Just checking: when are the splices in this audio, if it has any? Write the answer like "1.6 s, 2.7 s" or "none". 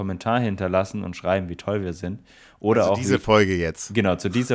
none